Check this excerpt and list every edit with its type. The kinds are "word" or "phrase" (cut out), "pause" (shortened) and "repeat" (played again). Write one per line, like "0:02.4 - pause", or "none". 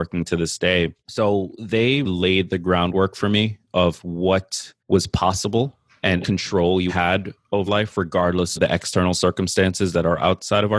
0:01.0 - pause
0:02.0 - word
0:04.8 - pause
0:06.2 - phrase
0:06.9 - word
0:07.7 - word
0:08.5 - phrase